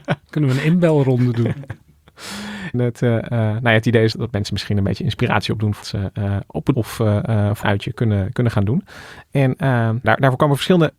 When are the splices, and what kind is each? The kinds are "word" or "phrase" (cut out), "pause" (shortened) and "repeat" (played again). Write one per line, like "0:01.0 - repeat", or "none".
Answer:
0:02.7 - word
0:04.1 - word
0:05.8 - word
0:06.7 - word
0:07.6 - word
0:10.0 - word